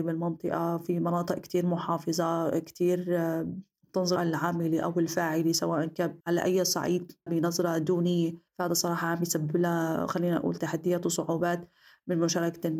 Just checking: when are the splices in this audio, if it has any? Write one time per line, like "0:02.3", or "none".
0:04.2
0:06.2
0:07.3
0:08.5